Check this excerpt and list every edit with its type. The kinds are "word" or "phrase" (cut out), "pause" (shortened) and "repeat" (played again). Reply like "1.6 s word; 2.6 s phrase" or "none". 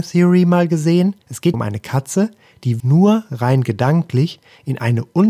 1.2 s pause; 1.5 s word; 2.8 s word